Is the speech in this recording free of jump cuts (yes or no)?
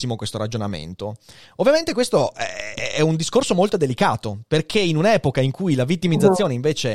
yes